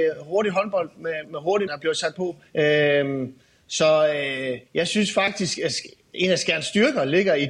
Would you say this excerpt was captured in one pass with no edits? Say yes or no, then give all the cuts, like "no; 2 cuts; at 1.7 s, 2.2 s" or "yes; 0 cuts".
no; 6 cuts; at 1.2 s, 1.7 s, 2.1 s, 2.5 s, 4.7 s, 5.6 s